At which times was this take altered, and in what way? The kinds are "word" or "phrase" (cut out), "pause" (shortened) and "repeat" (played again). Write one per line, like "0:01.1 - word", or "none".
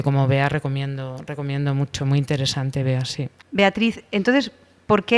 none